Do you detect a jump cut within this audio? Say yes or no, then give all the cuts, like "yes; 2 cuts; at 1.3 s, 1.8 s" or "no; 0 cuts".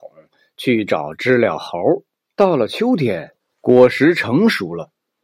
yes; 2 cuts; at 2.2 s, 3.4 s